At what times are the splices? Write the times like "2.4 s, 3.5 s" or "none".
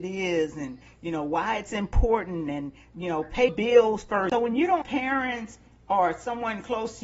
3.5 s, 4.8 s